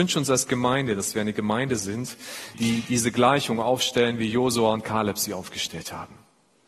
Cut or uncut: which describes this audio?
cut